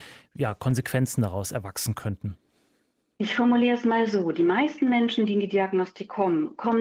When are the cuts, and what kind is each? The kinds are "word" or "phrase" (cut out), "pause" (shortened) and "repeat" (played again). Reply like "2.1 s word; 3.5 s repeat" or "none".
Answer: none